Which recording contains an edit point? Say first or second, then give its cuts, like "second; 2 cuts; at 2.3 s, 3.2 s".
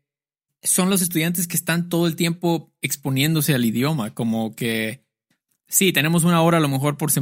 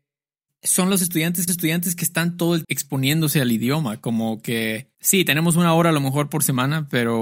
second; 3 cuts; at 1.5 s, 2.6 s, 4.9 s